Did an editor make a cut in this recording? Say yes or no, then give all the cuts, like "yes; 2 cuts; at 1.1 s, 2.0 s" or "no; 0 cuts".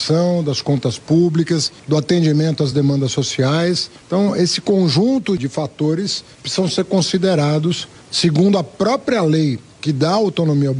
no; 0 cuts